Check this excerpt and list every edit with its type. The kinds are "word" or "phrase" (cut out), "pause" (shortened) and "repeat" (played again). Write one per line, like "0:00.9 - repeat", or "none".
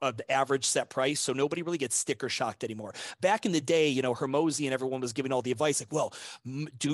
none